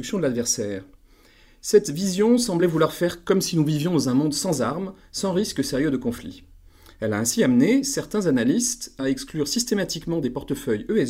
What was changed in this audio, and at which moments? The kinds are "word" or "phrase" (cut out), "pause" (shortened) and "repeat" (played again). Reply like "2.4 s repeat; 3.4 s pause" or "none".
none